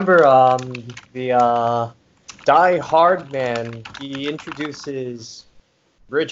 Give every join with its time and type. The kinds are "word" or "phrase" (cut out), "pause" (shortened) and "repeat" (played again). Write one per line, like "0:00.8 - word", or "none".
0:01.1 - pause

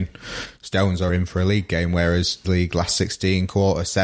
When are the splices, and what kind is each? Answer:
0:01.1 - word
0:02.4 - word

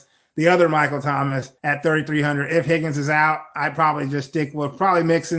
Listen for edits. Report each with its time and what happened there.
0:01.6 - pause

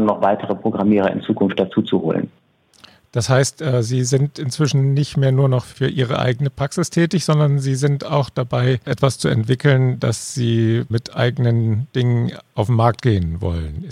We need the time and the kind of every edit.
none

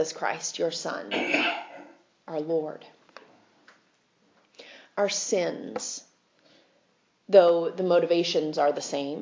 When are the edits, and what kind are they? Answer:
none

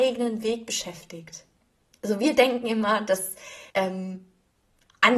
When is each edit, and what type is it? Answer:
0:03.7 - pause

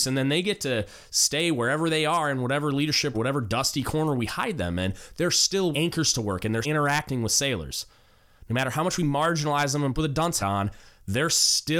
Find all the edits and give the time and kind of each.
0:03.1 - phrase
0:05.7 - word
0:06.6 - word
0:10.0 - phrase
0:10.4 - word

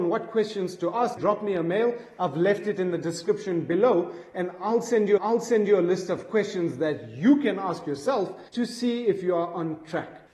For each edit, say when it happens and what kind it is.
0:01.2 - word
0:05.2 - repeat
0:08.5 - pause

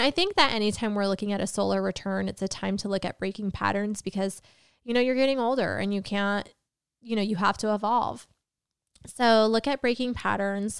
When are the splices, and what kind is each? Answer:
none

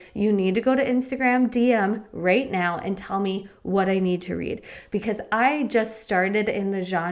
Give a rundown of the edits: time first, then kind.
none

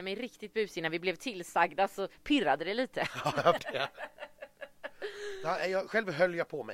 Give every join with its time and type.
0:03.6 - word

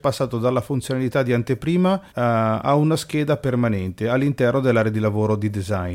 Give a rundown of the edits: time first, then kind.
0:02.1 - pause

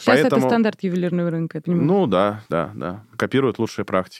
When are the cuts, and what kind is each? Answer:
0:01.6 - word
0:02.5 - pause

